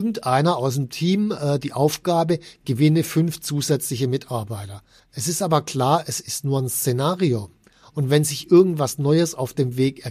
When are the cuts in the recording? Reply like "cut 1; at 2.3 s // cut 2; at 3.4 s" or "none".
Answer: none